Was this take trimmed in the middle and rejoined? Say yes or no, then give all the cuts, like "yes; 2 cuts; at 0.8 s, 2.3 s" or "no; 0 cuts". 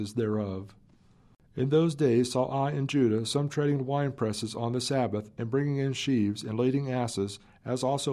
no; 0 cuts